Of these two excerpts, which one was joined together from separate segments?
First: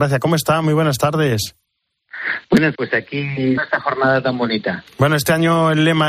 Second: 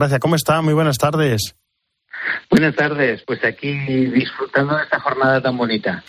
first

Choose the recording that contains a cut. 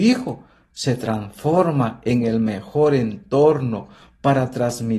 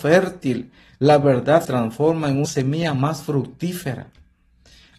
second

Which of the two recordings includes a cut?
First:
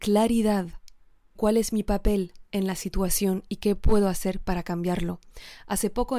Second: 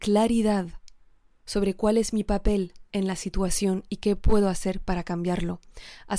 first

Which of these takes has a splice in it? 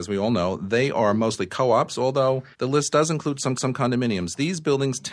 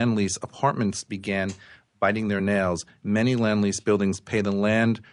first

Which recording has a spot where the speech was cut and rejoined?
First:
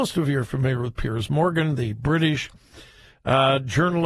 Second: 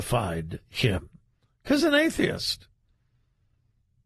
second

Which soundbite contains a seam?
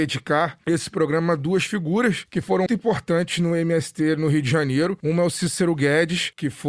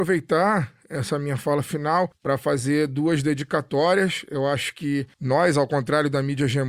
first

